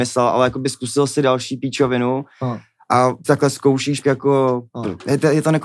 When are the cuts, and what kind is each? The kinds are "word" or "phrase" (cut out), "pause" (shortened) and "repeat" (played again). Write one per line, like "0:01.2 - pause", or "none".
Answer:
0:03.2 - word
0:04.0 - word
0:04.7 - pause